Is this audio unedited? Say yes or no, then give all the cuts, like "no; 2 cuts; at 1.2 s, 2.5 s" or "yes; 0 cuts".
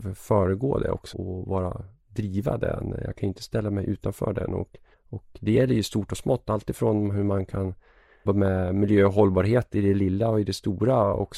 no; 3 cuts; at 1.1 s, 4.9 s, 8.3 s